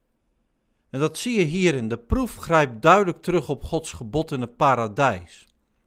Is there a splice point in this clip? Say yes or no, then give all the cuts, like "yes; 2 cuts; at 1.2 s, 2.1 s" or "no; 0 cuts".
no; 0 cuts